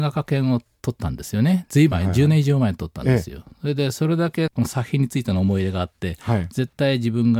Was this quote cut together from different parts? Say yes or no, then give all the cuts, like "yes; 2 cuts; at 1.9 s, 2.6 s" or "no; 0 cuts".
yes; 1 cut; at 1.9 s